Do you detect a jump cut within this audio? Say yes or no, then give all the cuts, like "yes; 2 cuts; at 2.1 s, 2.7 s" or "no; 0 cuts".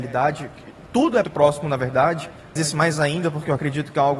yes; 2 cuts; at 1.2 s, 2.6 s